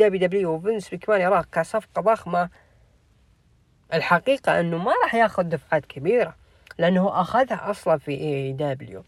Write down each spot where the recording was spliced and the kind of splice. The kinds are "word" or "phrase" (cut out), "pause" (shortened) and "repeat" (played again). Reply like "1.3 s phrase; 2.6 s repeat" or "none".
none

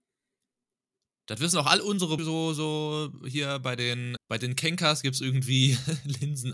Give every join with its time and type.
2.2 s phrase; 4.2 s word

